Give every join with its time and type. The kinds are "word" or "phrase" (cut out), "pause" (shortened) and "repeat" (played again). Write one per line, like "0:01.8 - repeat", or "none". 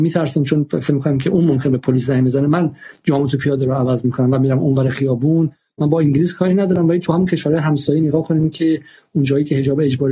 none